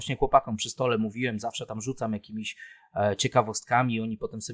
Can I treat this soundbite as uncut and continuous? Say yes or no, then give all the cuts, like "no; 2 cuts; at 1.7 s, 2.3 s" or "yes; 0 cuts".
yes; 0 cuts